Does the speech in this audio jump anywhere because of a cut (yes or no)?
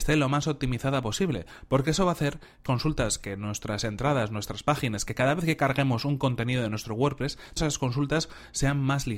yes